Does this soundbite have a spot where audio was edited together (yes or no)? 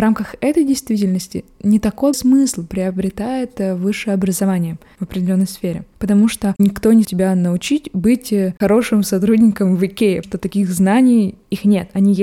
yes